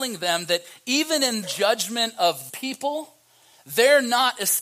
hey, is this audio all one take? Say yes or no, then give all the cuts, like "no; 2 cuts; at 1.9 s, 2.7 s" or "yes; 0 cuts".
no; 2 cuts; at 1.4 s, 2.5 s